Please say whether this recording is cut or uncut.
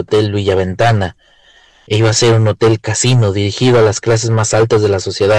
uncut